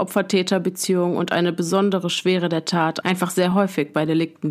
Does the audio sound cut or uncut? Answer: uncut